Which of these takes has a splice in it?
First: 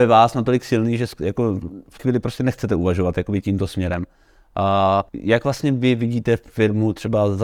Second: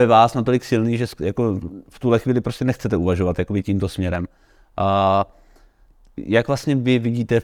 first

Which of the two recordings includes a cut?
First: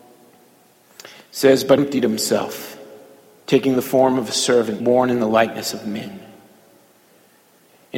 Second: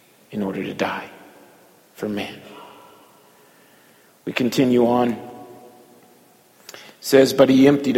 first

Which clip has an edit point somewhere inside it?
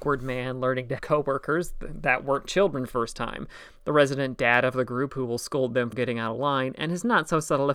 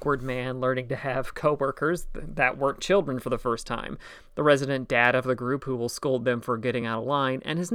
first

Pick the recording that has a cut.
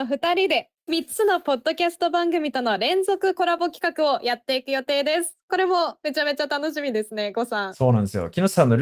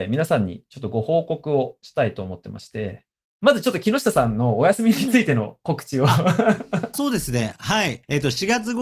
second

